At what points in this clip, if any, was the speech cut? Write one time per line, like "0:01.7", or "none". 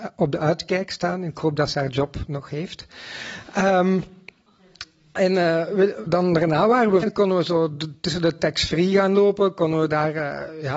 0:06.1
0:07.0